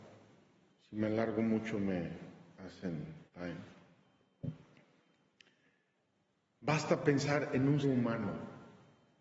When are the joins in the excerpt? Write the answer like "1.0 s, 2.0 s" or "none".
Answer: 3.3 s, 7.8 s